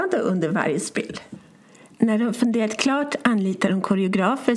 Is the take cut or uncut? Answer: uncut